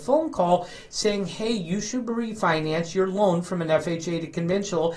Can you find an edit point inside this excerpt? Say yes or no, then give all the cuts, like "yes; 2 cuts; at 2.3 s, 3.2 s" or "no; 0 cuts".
no; 0 cuts